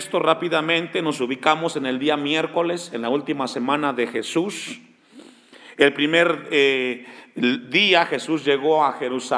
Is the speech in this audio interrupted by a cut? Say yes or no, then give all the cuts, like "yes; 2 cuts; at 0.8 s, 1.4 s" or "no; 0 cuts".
no; 0 cuts